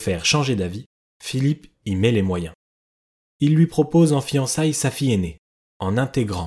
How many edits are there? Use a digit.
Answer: 0